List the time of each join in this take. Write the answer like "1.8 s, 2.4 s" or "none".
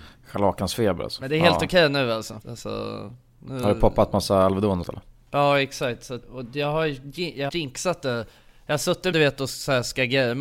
2.4 s, 4.8 s, 6.2 s, 7.5 s, 9.1 s